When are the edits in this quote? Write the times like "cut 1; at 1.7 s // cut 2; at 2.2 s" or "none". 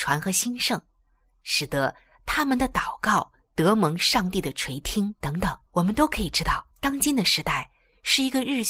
cut 1; at 5.7 s // cut 2; at 6.7 s